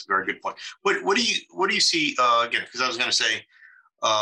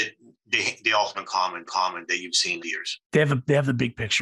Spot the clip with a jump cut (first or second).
second